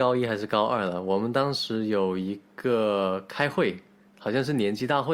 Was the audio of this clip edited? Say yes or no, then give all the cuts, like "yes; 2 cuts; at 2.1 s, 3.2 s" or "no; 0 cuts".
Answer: no; 0 cuts